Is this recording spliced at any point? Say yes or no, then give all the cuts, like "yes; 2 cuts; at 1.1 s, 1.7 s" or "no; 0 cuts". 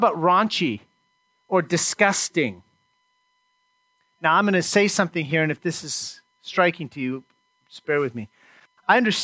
no; 0 cuts